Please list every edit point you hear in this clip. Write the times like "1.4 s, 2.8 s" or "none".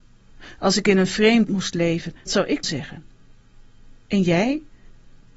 1.5 s, 2.3 s, 2.6 s